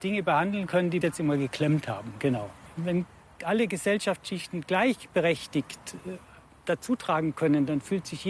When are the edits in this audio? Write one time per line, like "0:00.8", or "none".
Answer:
0:01.0